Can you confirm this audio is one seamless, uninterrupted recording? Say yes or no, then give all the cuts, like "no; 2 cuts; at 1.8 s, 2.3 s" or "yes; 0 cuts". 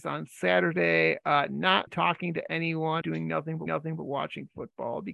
no; 3 cuts; at 1.9 s, 3.0 s, 3.7 s